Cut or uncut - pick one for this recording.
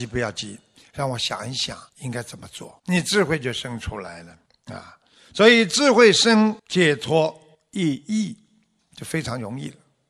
cut